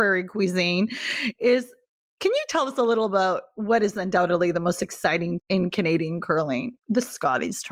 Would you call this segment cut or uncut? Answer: cut